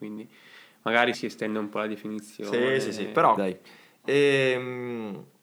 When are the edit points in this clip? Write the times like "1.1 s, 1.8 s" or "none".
1.1 s, 3.4 s